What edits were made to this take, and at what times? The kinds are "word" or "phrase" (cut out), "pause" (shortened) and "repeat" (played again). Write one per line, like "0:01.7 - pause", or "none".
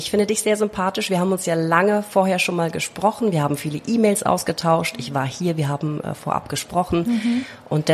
none